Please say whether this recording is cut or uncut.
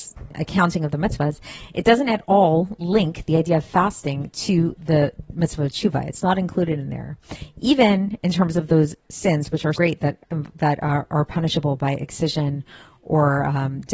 cut